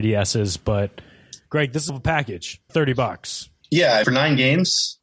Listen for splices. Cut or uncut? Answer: cut